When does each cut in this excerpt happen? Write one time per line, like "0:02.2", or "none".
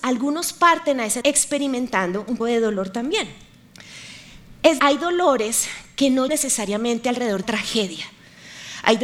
0:01.2
0:02.4
0:04.8
0:06.3
0:07.4

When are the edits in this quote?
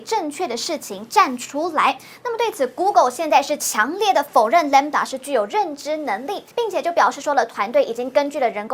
0:06.5

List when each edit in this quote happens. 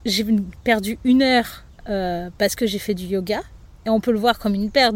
none

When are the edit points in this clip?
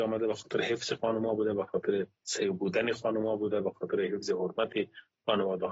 0:02.2

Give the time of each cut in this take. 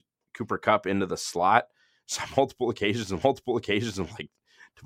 0:03.2

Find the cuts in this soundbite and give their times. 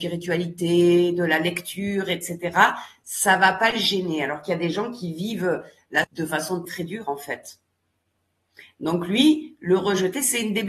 0:06.0
0:06.6

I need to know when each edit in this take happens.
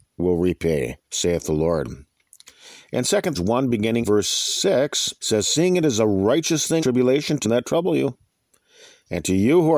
0:01.0
0:03.3
0:04.0
0:05.2
0:06.8
0:07.4

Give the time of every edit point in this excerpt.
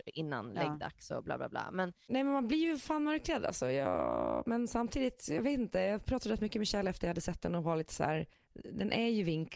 0:08.3

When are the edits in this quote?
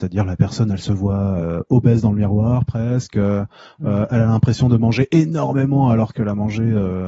none

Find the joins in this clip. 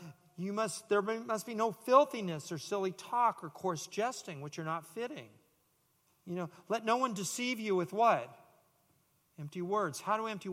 none

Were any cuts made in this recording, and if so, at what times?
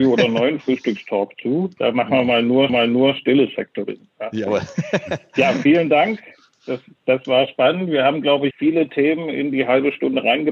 0:02.7
0:08.5

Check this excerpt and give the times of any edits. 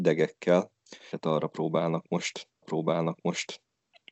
0:01.1
0:02.6

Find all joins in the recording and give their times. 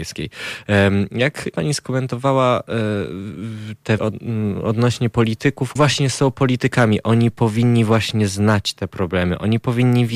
0:01.5
0:04.0
0:05.8

